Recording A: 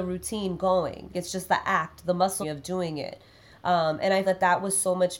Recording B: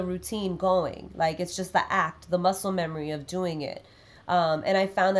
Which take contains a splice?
A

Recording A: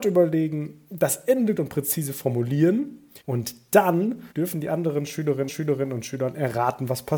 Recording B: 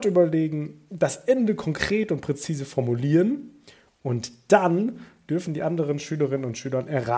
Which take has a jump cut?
A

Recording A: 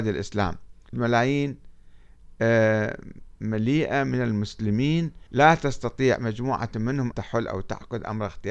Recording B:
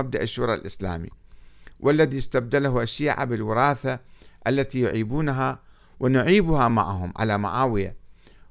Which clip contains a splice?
A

